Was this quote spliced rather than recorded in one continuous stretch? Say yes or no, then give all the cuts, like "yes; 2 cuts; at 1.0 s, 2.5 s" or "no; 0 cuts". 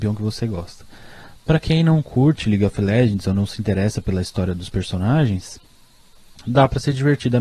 no; 0 cuts